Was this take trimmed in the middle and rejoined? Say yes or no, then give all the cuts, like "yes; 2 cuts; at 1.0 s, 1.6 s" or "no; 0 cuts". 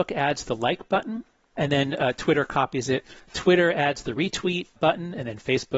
no; 0 cuts